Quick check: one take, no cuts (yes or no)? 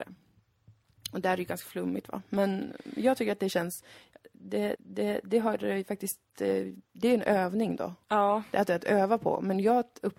no